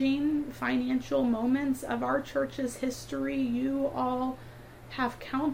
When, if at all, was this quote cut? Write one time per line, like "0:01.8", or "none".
none